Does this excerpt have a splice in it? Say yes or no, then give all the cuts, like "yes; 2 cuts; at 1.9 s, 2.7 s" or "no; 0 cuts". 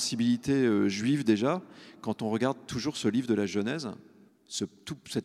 yes; 1 cut; at 4.3 s